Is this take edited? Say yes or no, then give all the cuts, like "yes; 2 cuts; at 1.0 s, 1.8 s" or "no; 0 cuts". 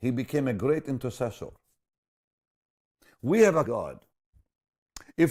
yes; 1 cut; at 3.6 s